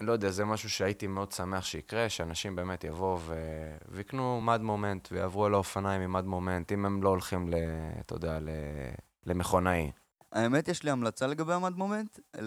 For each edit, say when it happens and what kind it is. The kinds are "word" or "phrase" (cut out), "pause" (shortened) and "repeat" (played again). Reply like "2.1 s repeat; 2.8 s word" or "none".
none